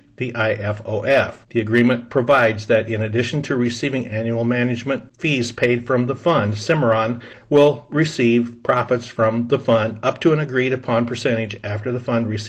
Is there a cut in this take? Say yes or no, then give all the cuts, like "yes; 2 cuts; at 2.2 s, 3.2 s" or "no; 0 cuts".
yes; 1 cut; at 1.4 s